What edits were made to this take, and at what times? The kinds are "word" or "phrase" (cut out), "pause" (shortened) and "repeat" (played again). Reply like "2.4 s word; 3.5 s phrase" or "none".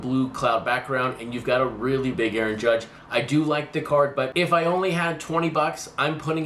2.1 s word